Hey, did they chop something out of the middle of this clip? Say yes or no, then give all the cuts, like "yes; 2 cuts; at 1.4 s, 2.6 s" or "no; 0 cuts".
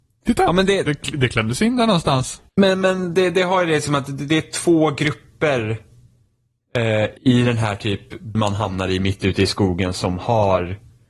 yes; 3 cuts; at 2.5 s, 7.2 s, 8.3 s